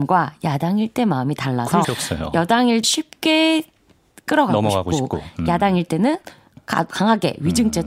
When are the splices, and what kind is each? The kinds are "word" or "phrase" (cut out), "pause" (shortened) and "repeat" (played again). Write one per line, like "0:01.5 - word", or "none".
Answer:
0:01.8 - word
0:02.8 - phrase
0:06.9 - word